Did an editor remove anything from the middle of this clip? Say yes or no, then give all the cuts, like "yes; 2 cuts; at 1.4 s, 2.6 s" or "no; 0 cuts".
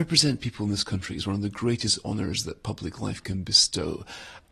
no; 0 cuts